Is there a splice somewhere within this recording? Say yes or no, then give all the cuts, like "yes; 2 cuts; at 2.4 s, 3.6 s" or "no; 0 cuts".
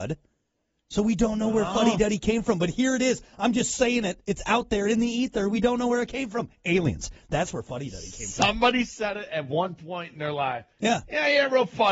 no; 0 cuts